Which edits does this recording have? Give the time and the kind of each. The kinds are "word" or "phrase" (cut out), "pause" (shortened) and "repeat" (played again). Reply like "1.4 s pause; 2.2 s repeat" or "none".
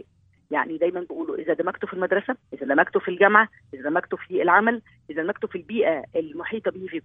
2.4 s pause

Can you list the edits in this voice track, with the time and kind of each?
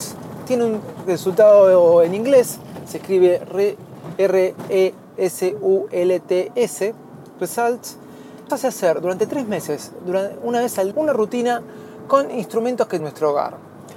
8.5 s word; 10.9 s word; 13.0 s phrase

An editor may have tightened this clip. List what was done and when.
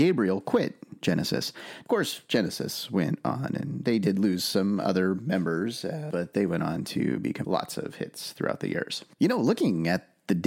7.4 s phrase

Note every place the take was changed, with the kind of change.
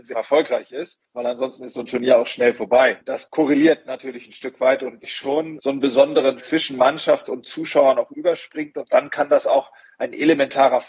1.0 s pause; 5.0 s phrase; 6.4 s phrase

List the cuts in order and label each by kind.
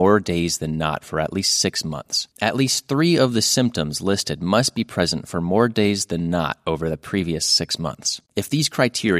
2.3 s pause; 8.3 s pause

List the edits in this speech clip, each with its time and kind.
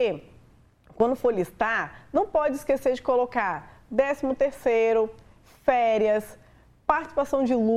none

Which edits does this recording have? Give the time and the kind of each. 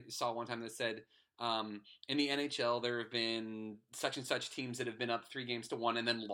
none

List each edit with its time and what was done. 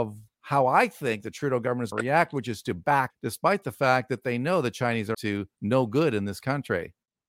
1.9 s word; 3.1 s word; 5.1 s word

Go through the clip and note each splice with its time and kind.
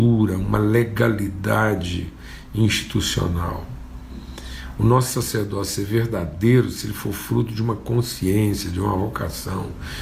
none

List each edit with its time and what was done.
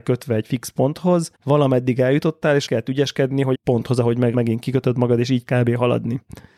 1.3 s pause; 2.7 s word; 3.5 s phrase; 4.3 s word; 5.5 s word

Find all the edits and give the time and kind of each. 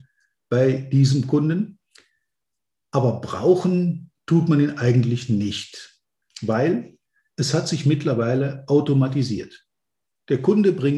none

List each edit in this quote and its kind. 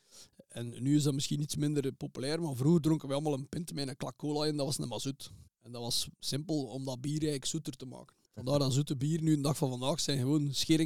5.5 s pause; 6.1 s pause; 8.2 s pause

